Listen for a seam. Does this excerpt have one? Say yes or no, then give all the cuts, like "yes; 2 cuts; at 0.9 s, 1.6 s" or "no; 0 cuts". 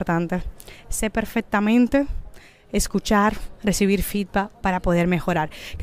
no; 0 cuts